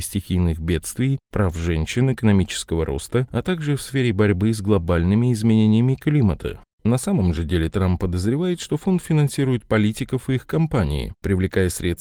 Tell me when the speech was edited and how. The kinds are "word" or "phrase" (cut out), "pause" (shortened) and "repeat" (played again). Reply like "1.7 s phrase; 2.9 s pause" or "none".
none